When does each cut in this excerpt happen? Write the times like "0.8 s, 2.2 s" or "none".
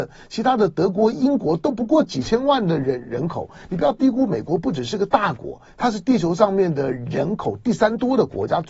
none

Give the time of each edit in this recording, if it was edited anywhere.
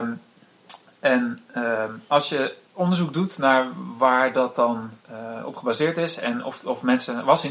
5.0 s

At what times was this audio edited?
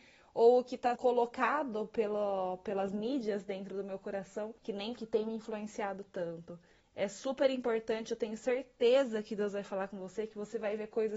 1.0 s, 4.6 s, 5.0 s, 6.8 s

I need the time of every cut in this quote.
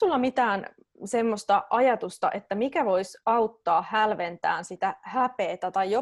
none

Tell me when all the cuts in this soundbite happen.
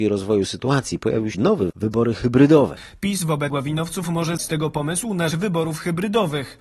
1.3 s, 1.7 s, 3.5 s, 4.4 s, 5.3 s

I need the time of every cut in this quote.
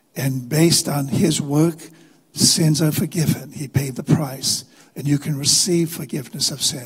none

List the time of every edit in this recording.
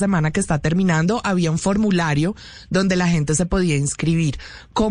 none

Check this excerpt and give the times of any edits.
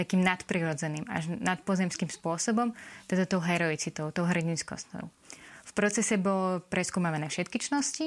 none

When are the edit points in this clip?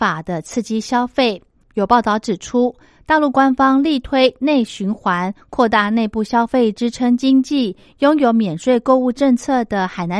none

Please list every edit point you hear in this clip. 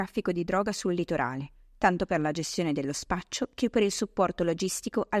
none

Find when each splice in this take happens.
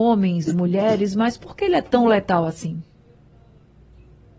none

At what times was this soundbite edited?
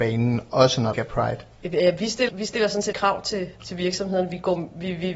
0.9 s, 2.3 s, 2.9 s

